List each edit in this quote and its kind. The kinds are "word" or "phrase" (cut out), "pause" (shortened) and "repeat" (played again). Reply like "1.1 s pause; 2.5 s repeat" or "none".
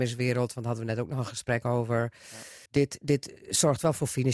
2.7 s pause